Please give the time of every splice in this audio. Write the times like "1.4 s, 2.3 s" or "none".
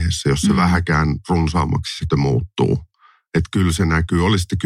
2.1 s